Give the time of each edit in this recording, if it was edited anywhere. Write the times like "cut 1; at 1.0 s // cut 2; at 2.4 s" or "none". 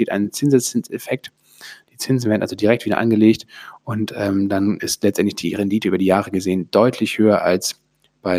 none